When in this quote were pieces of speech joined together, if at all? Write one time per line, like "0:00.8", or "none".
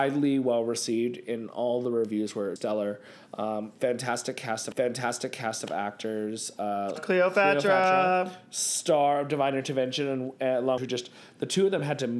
0:02.6
0:04.7
0:07.0
0:10.8